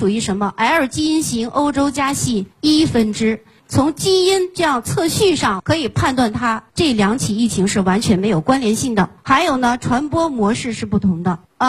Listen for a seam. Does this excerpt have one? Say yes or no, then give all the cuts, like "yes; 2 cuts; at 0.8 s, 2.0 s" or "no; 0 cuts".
yes; 3 cuts; at 2.5 s, 6.7 s, 9.2 s